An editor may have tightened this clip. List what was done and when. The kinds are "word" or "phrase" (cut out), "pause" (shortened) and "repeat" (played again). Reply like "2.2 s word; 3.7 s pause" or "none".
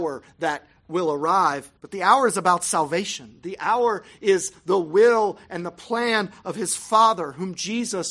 1.8 s pause